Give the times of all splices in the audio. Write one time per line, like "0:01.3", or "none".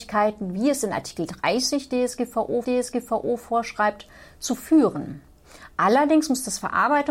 0:02.6